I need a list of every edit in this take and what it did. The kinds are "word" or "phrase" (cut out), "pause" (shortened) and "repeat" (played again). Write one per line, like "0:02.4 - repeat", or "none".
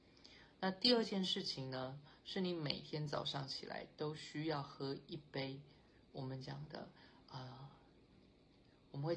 none